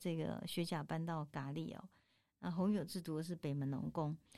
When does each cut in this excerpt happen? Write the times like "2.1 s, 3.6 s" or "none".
none